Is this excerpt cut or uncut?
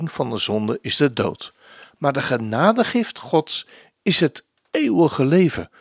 uncut